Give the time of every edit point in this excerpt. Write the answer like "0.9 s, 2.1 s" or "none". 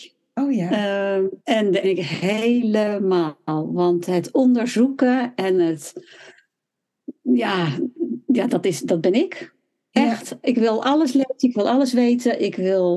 1.4 s, 1.8 s, 8.5 s